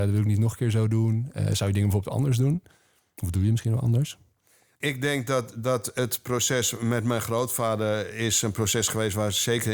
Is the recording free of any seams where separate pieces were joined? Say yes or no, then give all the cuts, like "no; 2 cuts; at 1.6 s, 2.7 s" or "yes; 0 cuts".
yes; 0 cuts